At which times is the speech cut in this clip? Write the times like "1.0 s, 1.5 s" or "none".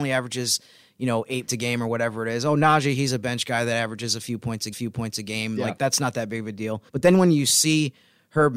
1.5 s, 4.7 s, 6.9 s